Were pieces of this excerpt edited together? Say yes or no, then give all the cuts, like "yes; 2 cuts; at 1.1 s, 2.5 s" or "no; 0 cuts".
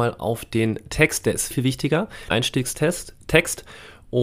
yes; 2 cuts; at 1.5 s, 2.3 s